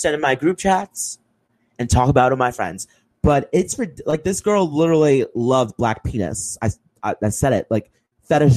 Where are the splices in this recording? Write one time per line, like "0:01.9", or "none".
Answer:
none